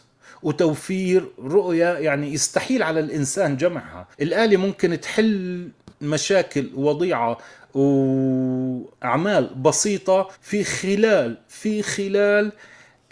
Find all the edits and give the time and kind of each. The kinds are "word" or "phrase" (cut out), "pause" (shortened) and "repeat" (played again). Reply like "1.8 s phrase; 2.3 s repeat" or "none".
4.1 s pause; 8.9 s pause; 10.3 s pause